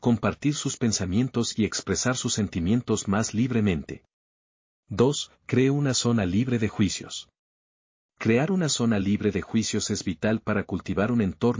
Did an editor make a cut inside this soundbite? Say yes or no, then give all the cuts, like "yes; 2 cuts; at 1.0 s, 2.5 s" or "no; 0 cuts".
no; 0 cuts